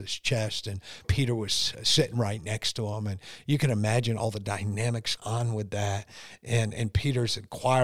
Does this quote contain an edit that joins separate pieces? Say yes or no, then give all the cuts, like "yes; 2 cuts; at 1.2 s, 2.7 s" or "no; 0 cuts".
yes; 2 cuts; at 1.0 s, 5.2 s